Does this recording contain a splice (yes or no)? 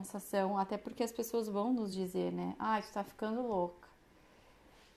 no